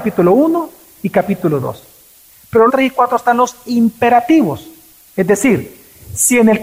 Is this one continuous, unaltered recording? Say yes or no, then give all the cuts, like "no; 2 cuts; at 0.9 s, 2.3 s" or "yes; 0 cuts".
no; 1 cut; at 2.7 s